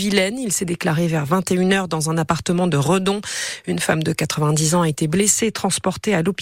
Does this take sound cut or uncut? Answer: uncut